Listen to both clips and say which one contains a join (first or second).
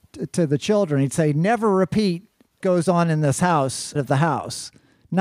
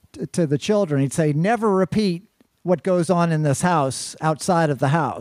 first